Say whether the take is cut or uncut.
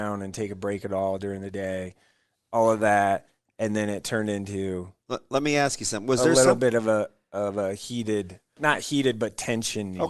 uncut